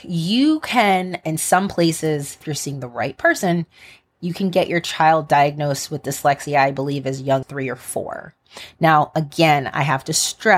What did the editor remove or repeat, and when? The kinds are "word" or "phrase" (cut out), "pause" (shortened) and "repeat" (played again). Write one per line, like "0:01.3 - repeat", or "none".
0:02.4 - word
0:07.4 - word